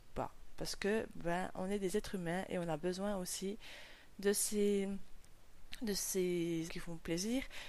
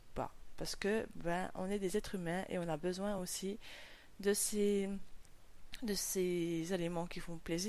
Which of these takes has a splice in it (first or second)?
first